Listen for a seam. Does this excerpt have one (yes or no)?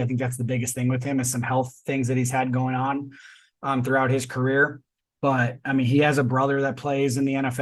no